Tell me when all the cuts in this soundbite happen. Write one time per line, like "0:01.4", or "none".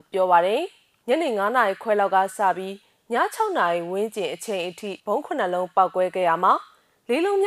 0:05.0